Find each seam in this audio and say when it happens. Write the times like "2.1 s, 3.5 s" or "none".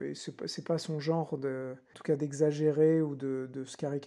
1.9 s